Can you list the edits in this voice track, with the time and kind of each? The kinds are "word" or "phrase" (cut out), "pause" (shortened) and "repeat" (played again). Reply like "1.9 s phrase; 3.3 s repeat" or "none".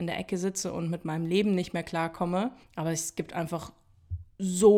2.6 s pause